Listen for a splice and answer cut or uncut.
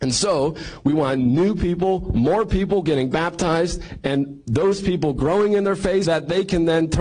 cut